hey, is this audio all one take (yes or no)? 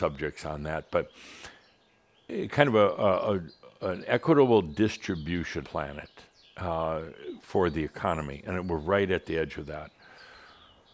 no